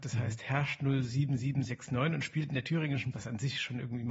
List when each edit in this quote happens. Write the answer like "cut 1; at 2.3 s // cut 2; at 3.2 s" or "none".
cut 1; at 3.1 s